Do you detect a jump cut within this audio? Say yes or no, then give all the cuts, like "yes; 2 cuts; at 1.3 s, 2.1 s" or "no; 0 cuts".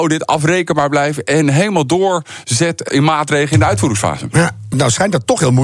yes; 2 cuts; at 2.9 s, 4.7 s